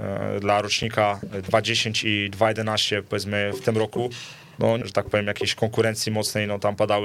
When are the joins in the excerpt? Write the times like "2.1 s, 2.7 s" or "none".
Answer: 4.8 s